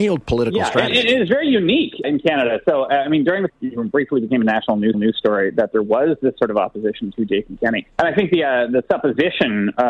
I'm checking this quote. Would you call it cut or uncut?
cut